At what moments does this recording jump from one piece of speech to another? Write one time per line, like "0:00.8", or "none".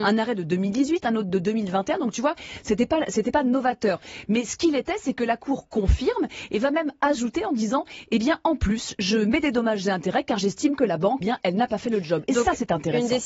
0:11.2